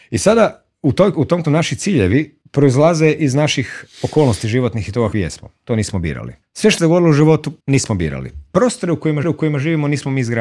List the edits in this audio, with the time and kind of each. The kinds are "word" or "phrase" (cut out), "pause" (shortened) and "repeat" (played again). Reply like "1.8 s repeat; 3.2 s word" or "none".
1.1 s word; 1.4 s word; 2.4 s pause; 5.1 s word; 6.4 s pause; 6.8 s phrase; 7.6 s pause; 9.2 s repeat